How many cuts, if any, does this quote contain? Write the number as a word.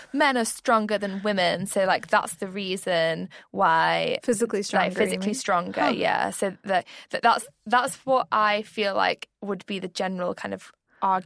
zero